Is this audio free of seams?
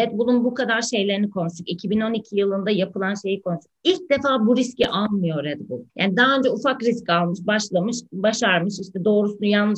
no; 2 cuts; at 3.8 s, 5.9 s

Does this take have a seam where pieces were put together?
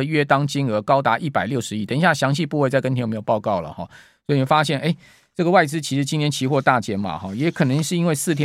no; 0 cuts

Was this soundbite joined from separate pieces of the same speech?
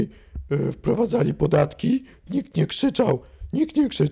yes; 1 cut; at 2.3 s

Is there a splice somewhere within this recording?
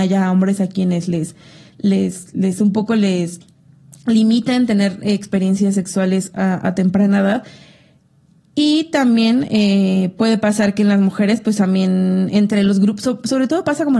no; 0 cuts

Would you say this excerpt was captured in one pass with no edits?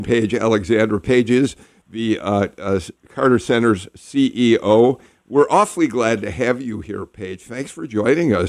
yes; 0 cuts

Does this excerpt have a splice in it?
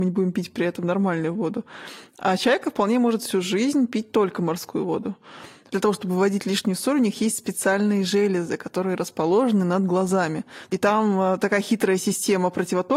no; 0 cuts

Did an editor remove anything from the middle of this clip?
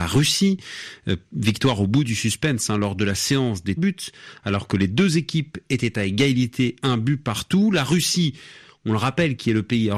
yes; 1 cut; at 3.8 s

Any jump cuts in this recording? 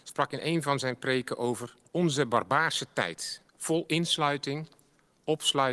yes; 1 cut; at 1.9 s

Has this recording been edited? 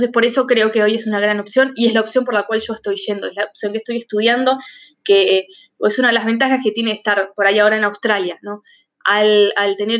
no; 0 cuts

